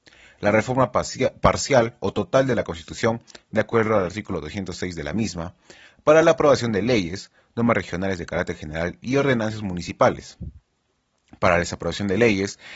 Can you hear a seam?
no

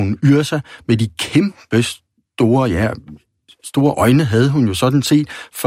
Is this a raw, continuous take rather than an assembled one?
yes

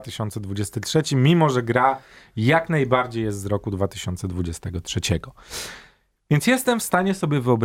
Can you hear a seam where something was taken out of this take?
no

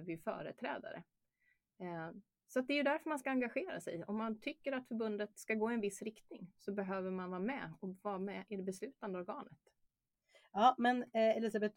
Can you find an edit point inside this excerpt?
no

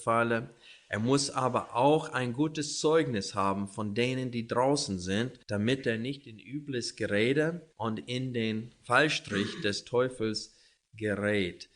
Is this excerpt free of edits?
no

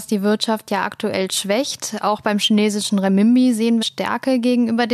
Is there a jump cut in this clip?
yes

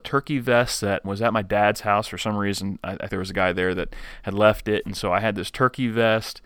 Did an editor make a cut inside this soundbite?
yes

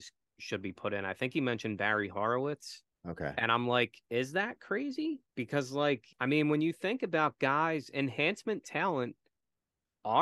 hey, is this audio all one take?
no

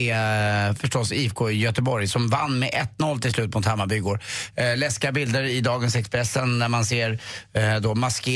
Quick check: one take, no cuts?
yes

